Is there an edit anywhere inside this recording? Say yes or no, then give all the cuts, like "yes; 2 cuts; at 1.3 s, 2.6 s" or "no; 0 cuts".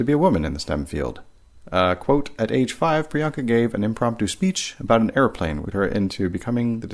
yes; 1 cut; at 5.7 s